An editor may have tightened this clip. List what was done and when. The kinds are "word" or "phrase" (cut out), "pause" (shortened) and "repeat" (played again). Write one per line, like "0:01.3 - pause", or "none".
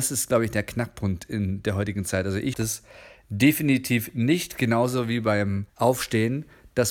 0:02.5 - word
0:05.7 - pause